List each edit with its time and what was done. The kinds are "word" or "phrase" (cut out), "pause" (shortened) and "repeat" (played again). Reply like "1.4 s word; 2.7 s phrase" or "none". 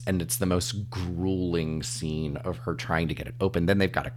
none